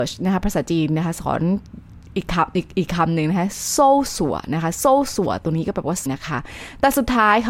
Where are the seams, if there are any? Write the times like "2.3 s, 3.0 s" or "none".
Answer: 6.1 s